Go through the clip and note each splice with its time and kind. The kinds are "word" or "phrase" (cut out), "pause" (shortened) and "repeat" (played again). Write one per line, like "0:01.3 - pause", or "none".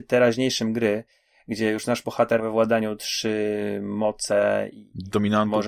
0:02.4 - word